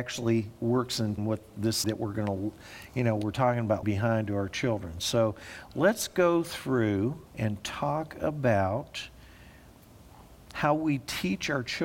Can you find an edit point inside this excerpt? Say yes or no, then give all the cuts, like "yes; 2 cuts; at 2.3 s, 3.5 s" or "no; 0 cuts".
yes; 4 cuts; at 1.2 s, 1.8 s, 3.8 s, 7.3 s